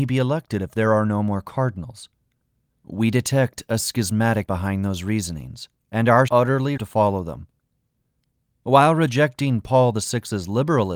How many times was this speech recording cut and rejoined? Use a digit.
4